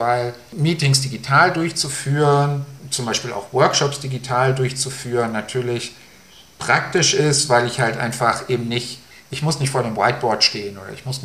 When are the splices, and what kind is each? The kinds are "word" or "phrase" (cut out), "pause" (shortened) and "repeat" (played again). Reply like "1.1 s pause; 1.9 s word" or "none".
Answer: none